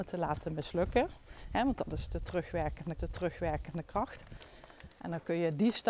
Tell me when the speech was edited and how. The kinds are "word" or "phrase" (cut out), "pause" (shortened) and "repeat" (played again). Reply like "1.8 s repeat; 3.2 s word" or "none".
3.0 s repeat